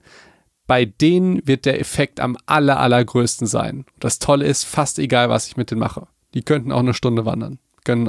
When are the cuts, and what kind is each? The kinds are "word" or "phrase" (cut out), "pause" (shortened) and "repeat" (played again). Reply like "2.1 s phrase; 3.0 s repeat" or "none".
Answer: none